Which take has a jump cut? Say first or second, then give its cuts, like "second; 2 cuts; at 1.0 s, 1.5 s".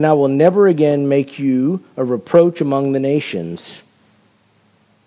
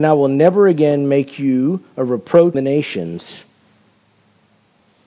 second; 1 cut; at 2.5 s